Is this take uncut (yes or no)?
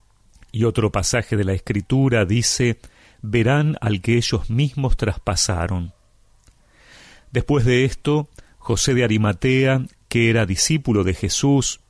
yes